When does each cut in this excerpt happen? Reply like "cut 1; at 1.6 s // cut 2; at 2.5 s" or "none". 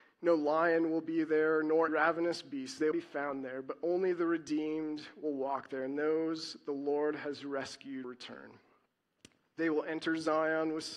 cut 1; at 1.9 s // cut 2; at 2.9 s // cut 3; at 8.0 s